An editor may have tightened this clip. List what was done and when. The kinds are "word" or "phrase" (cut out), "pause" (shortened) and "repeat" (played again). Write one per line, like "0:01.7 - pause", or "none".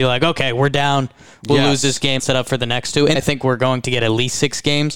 0:02.2 - word
0:03.2 - phrase